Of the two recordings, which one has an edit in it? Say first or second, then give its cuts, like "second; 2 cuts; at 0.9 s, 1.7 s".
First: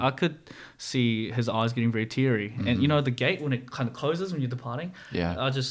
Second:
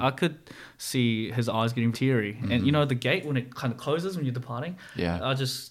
second; 1 cut; at 1.9 s